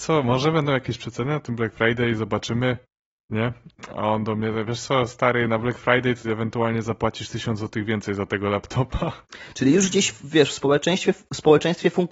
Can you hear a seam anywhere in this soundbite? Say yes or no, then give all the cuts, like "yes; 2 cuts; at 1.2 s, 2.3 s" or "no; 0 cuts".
yes; 1 cut; at 6.2 s